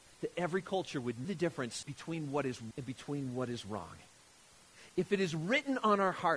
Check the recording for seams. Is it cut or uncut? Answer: cut